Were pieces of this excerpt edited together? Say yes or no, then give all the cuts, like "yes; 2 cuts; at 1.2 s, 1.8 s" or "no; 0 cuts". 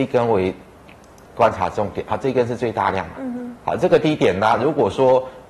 no; 0 cuts